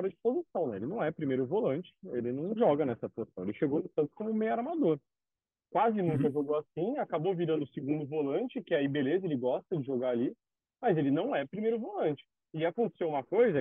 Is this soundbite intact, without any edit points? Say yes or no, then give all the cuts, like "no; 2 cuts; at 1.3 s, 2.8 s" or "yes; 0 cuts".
yes; 0 cuts